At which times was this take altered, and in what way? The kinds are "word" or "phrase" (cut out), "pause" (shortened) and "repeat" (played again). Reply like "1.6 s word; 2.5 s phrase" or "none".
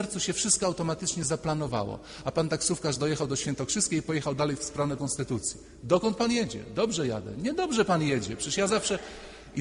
5.0 s word